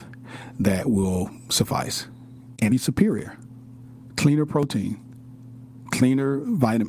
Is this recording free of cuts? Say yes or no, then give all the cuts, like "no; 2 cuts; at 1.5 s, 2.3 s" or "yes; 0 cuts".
no; 1 cut; at 2.7 s